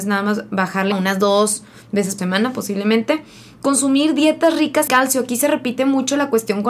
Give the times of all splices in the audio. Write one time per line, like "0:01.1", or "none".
0:00.9
0:02.2
0:04.9